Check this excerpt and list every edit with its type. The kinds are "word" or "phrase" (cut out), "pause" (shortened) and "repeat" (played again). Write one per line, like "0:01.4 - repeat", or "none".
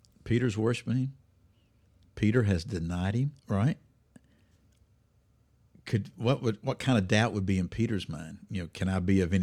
0:03.4 - pause